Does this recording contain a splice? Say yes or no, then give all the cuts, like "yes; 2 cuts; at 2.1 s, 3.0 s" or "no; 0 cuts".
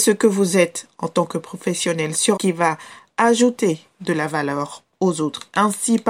yes; 1 cut; at 2.4 s